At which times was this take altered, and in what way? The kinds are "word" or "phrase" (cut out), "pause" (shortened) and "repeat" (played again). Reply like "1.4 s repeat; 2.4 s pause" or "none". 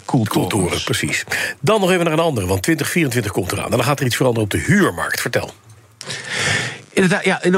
none